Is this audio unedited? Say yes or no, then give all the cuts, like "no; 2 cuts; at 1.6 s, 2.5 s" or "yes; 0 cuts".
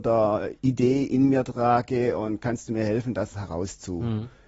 yes; 0 cuts